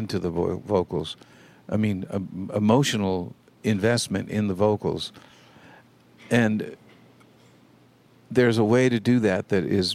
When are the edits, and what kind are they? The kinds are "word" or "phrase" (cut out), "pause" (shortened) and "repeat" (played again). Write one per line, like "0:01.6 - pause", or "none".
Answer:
none

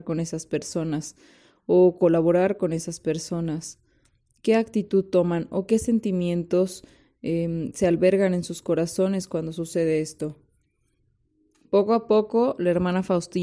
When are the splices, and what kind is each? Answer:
none

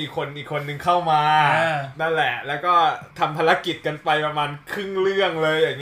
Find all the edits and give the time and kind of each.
0:03.1 - pause

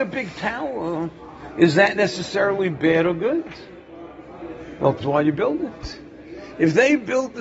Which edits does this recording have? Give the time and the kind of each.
0:05.0 - word

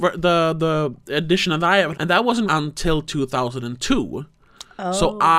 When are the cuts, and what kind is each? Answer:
0:01.9 - phrase
0:02.5 - word

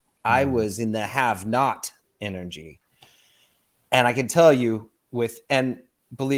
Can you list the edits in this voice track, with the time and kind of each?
none

